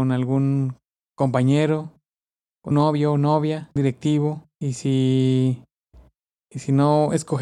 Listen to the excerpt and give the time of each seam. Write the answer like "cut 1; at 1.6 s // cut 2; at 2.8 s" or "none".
cut 1; at 2.7 s // cut 2; at 3.8 s